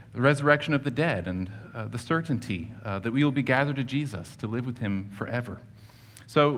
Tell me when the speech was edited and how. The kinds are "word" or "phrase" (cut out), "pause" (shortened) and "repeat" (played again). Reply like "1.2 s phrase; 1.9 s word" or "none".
none